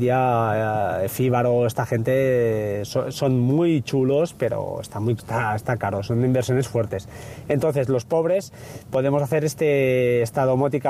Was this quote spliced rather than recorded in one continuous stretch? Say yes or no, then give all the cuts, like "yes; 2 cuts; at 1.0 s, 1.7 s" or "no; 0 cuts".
yes; 1 cut; at 5.2 s